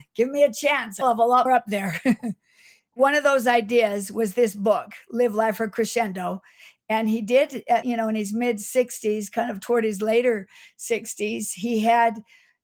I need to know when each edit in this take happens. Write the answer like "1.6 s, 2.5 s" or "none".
1.0 s, 1.5 s, 7.8 s